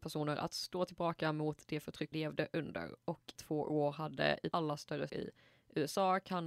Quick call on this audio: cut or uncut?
cut